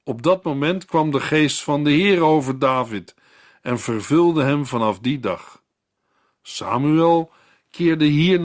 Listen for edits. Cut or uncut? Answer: uncut